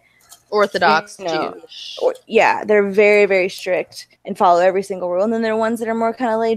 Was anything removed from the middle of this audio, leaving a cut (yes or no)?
yes